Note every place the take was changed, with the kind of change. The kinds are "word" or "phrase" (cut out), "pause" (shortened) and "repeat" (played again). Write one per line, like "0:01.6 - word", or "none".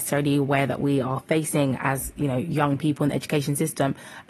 none